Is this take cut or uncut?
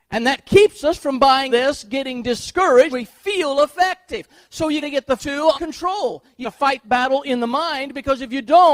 cut